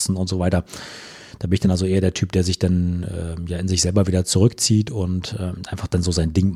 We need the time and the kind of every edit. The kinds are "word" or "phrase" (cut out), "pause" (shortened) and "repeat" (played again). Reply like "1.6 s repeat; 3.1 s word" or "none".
none